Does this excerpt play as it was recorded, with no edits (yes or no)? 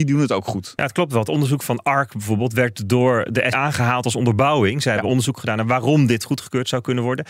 no